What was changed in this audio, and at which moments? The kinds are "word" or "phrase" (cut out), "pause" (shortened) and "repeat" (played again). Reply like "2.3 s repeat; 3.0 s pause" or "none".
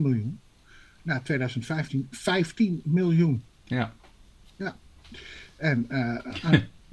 3.5 s pause